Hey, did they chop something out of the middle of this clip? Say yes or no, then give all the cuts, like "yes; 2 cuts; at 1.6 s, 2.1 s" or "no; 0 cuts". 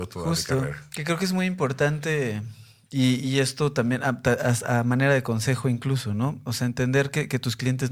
no; 0 cuts